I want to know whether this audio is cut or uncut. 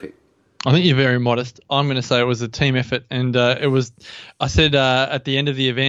uncut